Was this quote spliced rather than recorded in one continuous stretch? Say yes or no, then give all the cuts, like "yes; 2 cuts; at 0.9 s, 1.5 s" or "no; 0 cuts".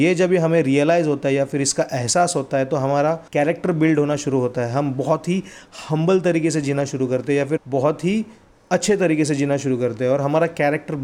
yes; 3 cuts; at 3.3 s, 7.6 s, 8.5 s